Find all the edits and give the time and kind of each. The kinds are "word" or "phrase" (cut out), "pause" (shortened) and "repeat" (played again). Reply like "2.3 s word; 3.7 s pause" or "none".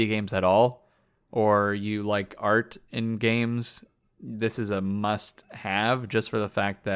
none